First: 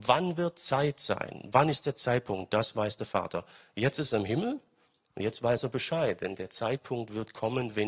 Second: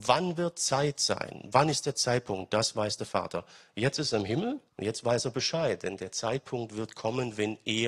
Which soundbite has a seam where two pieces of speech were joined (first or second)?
second